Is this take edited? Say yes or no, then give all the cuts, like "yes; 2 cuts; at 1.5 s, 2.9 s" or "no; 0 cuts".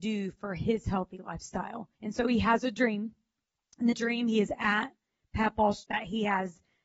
yes; 3 cuts; at 1.9 s, 3.9 s, 5.8 s